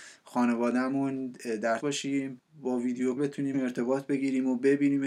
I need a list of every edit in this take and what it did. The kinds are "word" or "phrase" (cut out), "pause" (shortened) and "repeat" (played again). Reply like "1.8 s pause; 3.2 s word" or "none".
1.8 s word; 3.2 s word; 3.5 s word